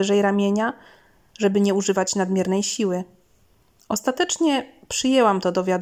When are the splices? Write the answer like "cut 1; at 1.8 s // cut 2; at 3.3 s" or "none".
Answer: none